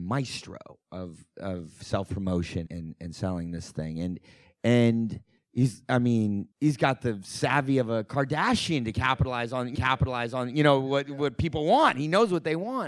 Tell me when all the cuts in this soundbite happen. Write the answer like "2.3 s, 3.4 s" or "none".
2.7 s, 5.4 s, 6.5 s, 9.7 s